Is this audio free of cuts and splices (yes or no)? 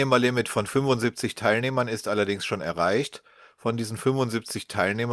yes